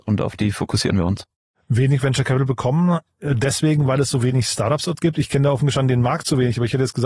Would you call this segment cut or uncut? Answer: uncut